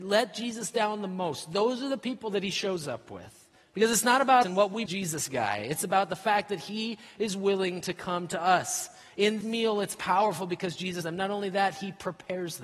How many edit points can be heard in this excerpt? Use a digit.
5